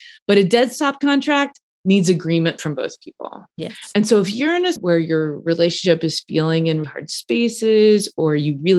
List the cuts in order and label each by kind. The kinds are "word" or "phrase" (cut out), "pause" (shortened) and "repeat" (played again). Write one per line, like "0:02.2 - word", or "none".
0:03.5 - pause
0:04.8 - word
0:06.8 - word